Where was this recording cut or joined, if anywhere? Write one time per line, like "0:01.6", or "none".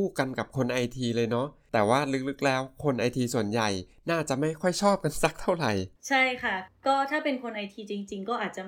0:06.0